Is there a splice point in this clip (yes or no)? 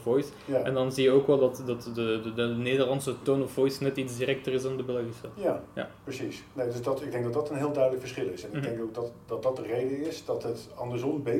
no